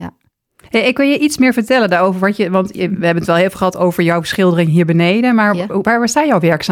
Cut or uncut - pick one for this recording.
uncut